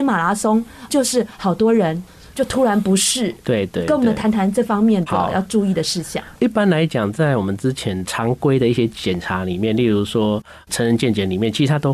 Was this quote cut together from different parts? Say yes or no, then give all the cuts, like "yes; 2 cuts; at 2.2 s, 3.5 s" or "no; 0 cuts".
yes; 1 cut; at 6.4 s